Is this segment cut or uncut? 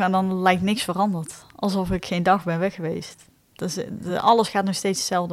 uncut